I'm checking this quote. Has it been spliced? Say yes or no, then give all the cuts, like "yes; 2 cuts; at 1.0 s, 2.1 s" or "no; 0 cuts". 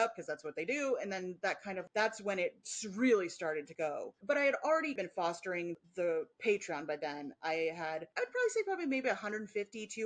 no; 0 cuts